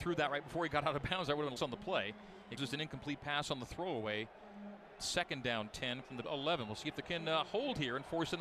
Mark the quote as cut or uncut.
cut